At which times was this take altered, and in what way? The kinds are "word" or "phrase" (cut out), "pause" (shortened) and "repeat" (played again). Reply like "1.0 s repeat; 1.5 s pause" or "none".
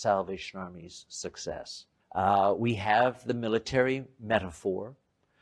2.0 s pause